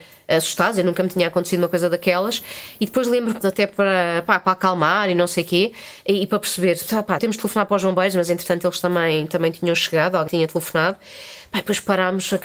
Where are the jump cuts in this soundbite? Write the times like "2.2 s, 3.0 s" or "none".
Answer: 3.4 s, 7.2 s, 10.3 s